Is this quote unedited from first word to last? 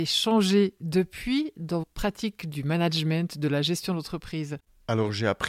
no; 2 cuts; at 1.8 s, 2.5 s

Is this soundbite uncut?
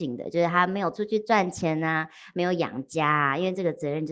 yes; 0 cuts

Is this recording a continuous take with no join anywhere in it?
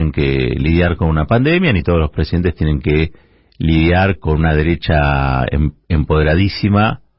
yes; 0 cuts

